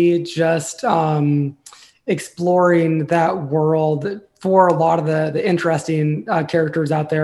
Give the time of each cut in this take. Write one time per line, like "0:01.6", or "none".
none